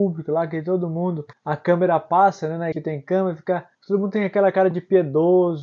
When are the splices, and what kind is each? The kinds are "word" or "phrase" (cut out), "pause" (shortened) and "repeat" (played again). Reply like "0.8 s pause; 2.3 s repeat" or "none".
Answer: 1.3 s pause; 2.7 s word; 3.7 s pause